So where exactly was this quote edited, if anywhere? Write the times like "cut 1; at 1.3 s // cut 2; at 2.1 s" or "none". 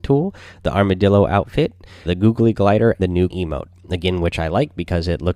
cut 1; at 2.1 s // cut 2; at 3.0 s // cut 3; at 3.3 s